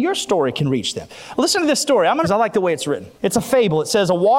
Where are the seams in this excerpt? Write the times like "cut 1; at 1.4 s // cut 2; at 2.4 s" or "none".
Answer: cut 1; at 2.2 s // cut 2; at 3.2 s